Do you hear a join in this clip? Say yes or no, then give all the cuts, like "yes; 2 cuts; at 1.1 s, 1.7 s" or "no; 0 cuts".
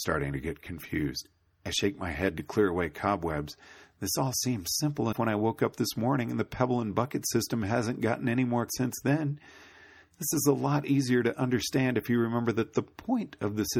yes; 2 cuts; at 5.1 s, 8.7 s